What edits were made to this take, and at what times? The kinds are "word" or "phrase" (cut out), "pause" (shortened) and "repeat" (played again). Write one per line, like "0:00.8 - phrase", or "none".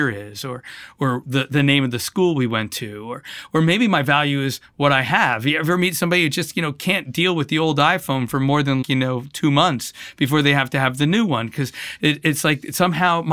0:08.8 - word